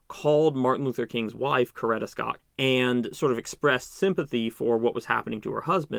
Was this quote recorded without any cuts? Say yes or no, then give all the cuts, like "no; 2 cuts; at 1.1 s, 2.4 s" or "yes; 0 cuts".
no; 1 cut; at 2.4 s